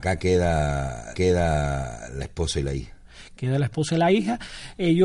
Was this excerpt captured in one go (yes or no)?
no